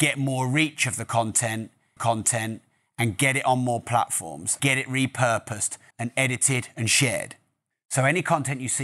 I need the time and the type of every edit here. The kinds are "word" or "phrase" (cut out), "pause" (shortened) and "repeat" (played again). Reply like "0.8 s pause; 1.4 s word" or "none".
2.0 s repeat; 4.6 s word; 5.9 s phrase